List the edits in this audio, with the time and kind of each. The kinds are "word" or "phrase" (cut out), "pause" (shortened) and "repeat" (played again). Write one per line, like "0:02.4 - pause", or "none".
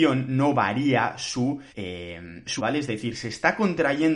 0:01.7 - pause
0:02.6 - word